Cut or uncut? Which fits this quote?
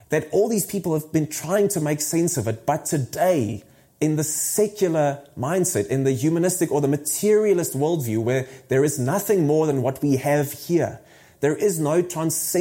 uncut